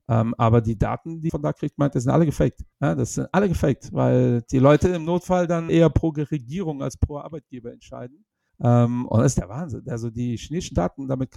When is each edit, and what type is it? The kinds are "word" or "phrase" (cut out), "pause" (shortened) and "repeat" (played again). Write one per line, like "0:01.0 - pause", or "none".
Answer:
0:01.3 - word
0:02.7 - pause
0:05.7 - word
0:08.5 - pause